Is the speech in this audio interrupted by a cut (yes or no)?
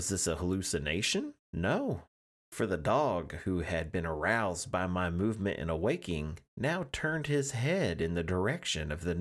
yes